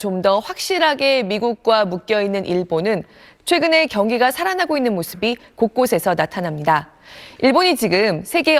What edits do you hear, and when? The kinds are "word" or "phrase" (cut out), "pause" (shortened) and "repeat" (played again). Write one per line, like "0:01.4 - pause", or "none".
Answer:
none